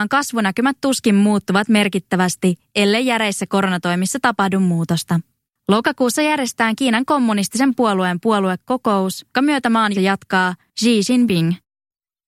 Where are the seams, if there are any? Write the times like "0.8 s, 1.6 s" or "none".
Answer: 5.5 s, 9.3 s, 9.9 s

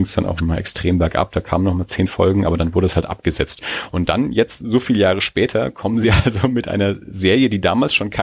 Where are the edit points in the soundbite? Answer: none

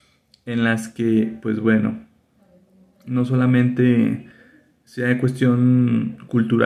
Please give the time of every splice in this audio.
none

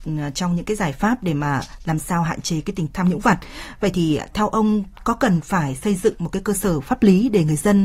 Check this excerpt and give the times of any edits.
2.9 s

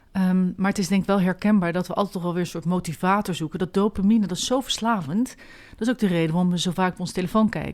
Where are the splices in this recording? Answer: none

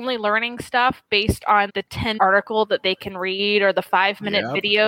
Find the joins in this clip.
1.7 s, 2.2 s

